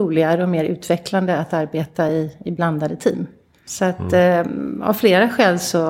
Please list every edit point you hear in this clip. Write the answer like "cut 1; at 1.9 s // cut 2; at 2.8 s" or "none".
none